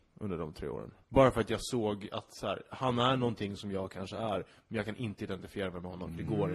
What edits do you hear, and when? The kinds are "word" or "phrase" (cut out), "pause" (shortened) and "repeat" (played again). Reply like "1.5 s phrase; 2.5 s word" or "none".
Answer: 1.0 s pause